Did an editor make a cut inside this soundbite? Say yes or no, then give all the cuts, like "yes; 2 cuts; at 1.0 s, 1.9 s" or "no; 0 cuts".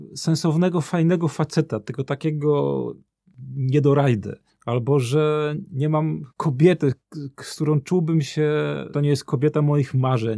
yes; 3 cuts; at 4.5 s, 6.3 s, 8.9 s